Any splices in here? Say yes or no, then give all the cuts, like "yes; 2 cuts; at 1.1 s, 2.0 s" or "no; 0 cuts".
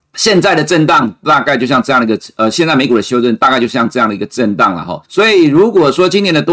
yes; 1 cut; at 5.0 s